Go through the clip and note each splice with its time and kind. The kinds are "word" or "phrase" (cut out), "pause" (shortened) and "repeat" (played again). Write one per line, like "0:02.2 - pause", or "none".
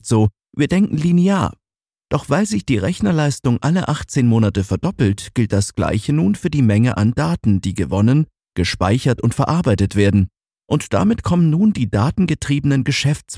none